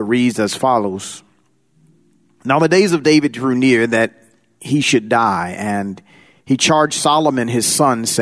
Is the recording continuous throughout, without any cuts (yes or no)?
yes